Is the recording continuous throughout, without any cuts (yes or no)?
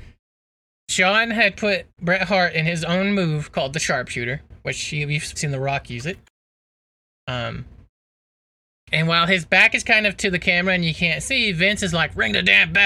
no